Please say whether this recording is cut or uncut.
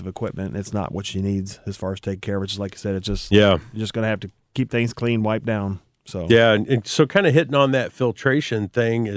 uncut